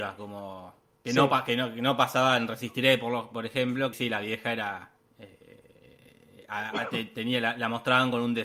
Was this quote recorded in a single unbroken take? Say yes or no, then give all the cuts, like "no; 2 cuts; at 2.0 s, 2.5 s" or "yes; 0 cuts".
no; 3 cuts; at 0.9 s, 3.9 s, 5.0 s